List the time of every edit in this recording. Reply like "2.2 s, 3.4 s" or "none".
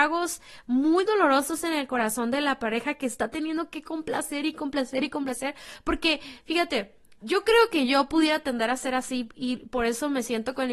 7.2 s